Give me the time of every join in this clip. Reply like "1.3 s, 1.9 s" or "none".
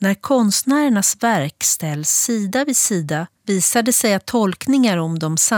3.3 s

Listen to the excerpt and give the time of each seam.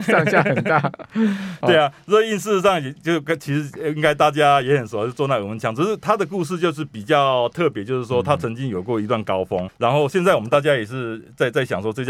9.7 s

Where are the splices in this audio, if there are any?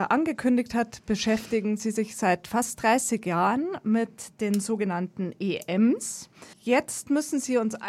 6.5 s

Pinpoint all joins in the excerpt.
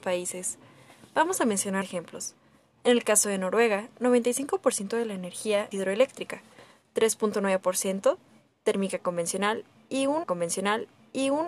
1.8 s, 5.7 s, 10.2 s

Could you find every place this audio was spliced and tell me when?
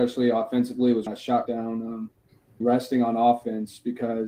1.1 s, 1.5 s, 2.6 s

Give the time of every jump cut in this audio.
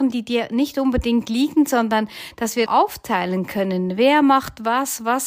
2.7 s

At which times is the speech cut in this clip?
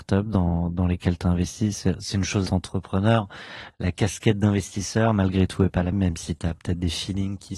2.5 s, 5.9 s

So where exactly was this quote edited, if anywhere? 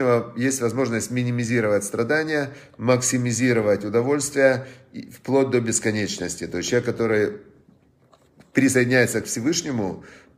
none

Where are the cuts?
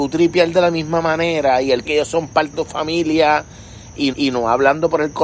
1.8 s, 2.5 s, 4.1 s

